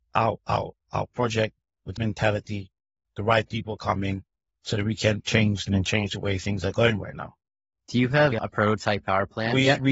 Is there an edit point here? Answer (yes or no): yes